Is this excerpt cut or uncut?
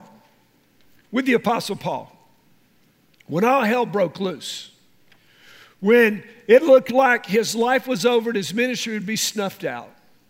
uncut